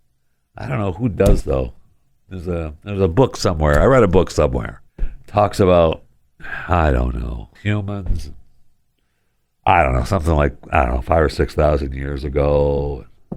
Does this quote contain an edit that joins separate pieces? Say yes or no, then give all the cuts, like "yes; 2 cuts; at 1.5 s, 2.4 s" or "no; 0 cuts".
yes; 3 cuts; at 1.4 s, 4.9 s, 7.6 s